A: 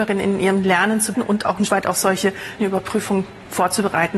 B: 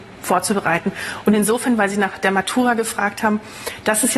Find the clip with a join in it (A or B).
A